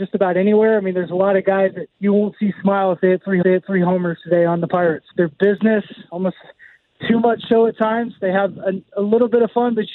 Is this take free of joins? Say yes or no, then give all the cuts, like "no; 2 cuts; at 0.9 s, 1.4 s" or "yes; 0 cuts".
no; 3 cuts; at 1.9 s, 3.4 s, 5.1 s